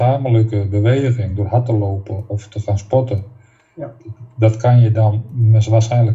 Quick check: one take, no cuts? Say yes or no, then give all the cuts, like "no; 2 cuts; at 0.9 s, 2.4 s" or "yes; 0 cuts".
yes; 0 cuts